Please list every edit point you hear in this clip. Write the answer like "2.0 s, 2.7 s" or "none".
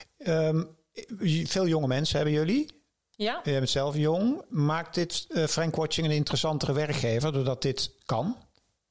none